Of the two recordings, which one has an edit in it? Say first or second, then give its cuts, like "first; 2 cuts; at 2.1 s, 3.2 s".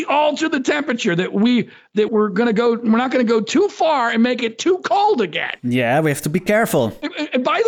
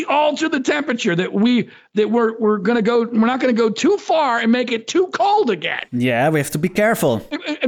first; 1 cut; at 2.1 s